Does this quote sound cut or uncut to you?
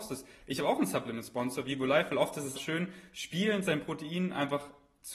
cut